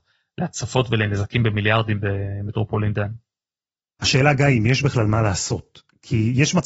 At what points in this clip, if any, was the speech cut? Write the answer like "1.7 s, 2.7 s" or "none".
none

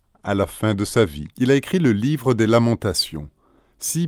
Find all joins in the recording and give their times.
1.3 s

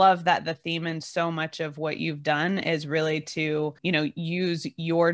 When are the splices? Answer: 3.8 s

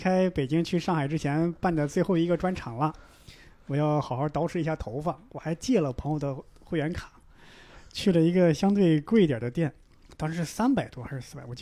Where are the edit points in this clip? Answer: none

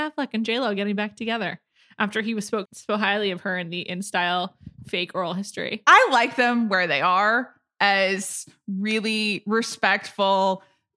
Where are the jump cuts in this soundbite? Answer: 2.7 s

